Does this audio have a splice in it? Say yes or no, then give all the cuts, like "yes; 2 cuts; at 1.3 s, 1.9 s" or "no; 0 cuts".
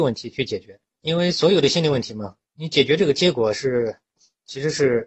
yes; 2 cuts; at 0.9 s, 2.4 s